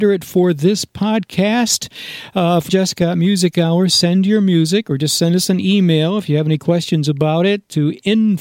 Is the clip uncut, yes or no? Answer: no